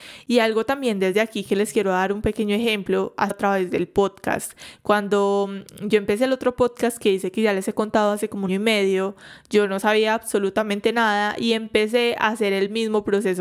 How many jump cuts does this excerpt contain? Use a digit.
2